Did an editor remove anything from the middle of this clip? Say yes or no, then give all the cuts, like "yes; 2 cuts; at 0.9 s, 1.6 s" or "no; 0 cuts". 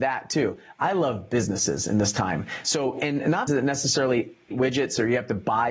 yes; 2 cuts; at 3.5 s, 4.5 s